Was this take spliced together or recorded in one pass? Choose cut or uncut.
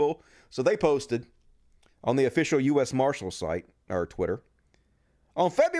uncut